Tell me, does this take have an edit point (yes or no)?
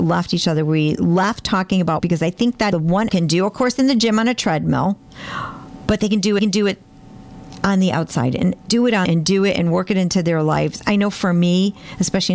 yes